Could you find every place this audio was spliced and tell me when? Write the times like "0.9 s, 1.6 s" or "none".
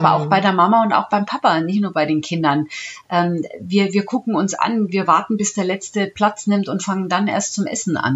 none